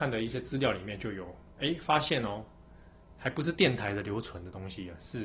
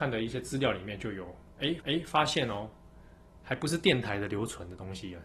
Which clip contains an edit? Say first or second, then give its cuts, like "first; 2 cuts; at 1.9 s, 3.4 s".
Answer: second; 1 cut; at 1.8 s